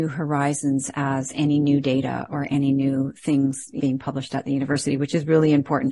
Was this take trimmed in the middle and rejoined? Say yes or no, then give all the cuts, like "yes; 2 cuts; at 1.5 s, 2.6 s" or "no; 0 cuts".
yes; 1 cut; at 3.8 s